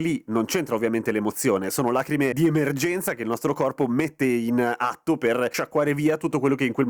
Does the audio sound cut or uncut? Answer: uncut